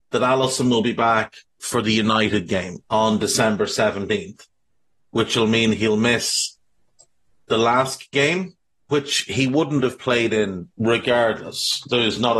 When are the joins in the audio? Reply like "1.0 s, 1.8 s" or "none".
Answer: 2.9 s